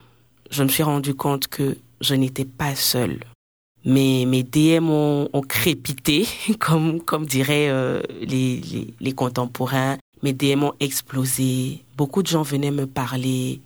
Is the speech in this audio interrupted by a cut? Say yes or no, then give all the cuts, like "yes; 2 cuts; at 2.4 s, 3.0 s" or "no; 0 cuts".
no; 0 cuts